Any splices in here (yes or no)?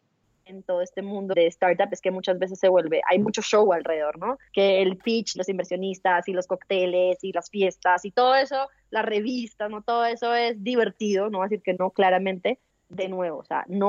yes